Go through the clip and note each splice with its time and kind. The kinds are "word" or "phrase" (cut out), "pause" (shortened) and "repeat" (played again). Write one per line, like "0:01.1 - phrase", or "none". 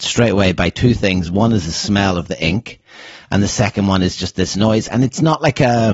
none